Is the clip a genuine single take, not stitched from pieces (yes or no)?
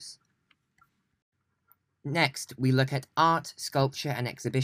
yes